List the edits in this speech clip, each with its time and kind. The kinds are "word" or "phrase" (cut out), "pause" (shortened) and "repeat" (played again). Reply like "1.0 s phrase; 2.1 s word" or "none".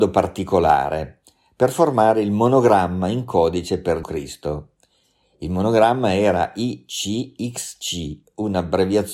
4.0 s word